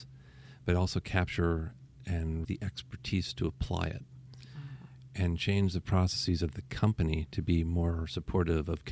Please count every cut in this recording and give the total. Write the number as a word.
one